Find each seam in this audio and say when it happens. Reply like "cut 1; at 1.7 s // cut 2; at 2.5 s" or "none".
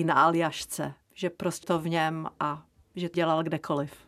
cut 1; at 1.6 s // cut 2; at 3.1 s